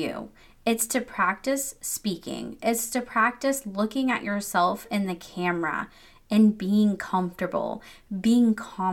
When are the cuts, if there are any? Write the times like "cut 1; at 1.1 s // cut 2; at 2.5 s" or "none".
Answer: none